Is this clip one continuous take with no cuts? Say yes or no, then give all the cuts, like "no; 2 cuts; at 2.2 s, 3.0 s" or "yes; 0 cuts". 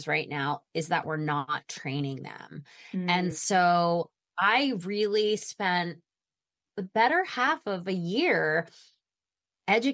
yes; 0 cuts